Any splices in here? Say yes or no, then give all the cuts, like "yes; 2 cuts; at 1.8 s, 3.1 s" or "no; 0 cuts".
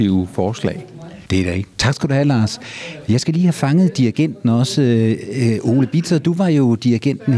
yes; 1 cut; at 1.3 s